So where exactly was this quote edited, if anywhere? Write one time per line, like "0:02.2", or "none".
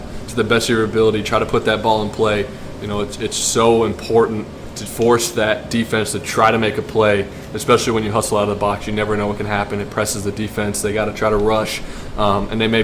0:04.9